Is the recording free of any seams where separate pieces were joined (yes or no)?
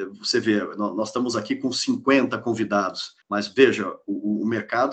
no